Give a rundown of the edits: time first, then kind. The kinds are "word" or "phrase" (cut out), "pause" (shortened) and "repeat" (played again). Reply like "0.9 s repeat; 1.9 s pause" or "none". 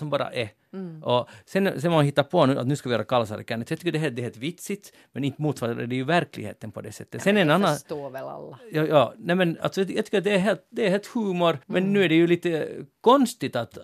11.6 s pause